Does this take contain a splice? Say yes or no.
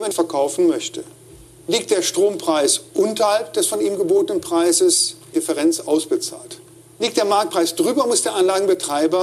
yes